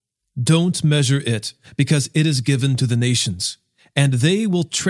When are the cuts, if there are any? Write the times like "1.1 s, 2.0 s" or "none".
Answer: none